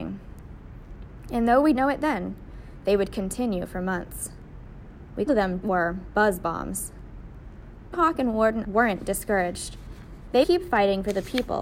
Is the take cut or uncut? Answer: cut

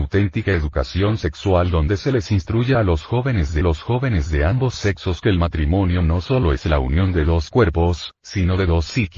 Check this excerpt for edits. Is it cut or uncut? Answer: cut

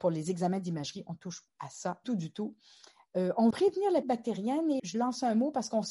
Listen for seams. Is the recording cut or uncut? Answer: cut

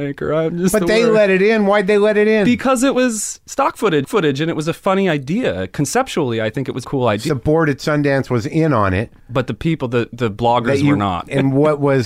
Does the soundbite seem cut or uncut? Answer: cut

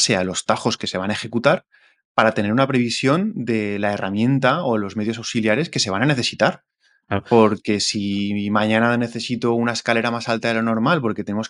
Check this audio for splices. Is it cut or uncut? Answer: uncut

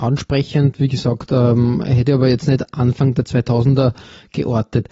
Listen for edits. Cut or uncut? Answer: uncut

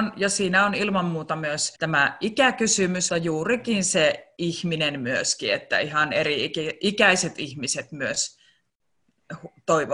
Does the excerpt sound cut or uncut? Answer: cut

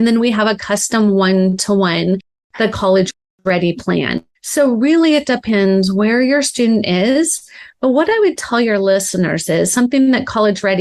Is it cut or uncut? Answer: uncut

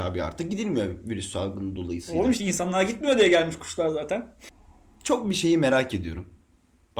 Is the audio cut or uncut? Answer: uncut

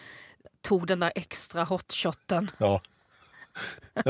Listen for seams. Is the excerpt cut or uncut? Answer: uncut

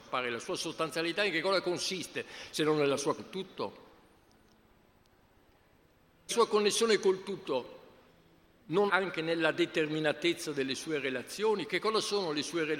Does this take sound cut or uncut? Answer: cut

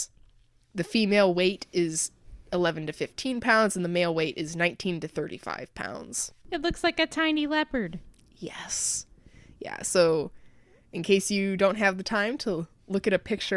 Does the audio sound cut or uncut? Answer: cut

